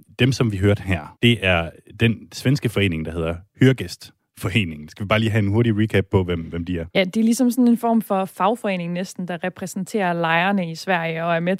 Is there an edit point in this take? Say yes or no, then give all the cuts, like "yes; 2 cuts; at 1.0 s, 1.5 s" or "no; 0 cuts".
yes; 2 cuts; at 1.2 s, 6.9 s